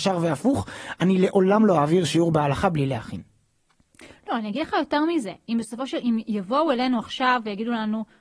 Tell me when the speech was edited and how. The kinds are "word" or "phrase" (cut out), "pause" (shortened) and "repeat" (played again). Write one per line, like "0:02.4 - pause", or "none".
none